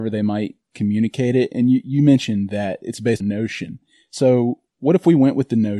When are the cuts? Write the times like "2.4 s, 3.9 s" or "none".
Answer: 3.2 s